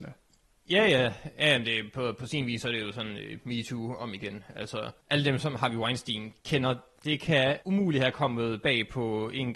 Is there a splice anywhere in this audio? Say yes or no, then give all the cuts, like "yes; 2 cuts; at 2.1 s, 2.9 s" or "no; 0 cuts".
yes; 3 cuts; at 5.0 s, 6.4 s, 7.6 s